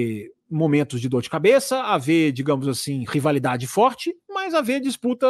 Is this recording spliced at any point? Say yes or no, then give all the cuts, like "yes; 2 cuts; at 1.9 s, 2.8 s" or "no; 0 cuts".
no; 0 cuts